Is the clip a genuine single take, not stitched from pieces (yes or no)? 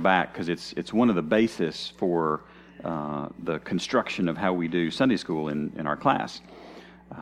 yes